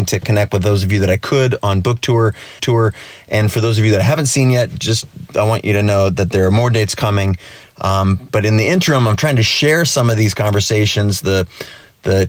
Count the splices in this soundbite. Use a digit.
1